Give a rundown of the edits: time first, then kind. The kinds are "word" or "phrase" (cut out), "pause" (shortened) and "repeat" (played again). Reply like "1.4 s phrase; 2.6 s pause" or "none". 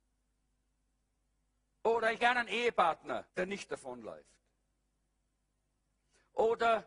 2.2 s word; 3.3 s pause